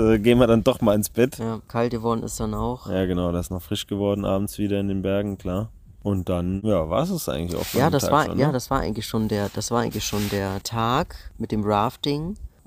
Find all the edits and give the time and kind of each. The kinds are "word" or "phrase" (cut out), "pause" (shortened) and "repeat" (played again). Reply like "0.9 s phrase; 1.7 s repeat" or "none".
none